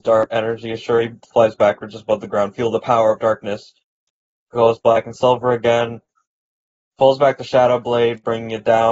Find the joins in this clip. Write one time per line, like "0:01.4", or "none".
none